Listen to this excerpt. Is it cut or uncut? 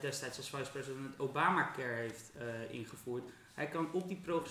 uncut